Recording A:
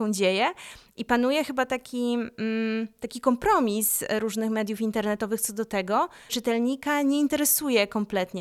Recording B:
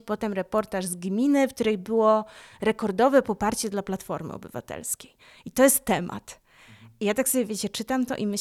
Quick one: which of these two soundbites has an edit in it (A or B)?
A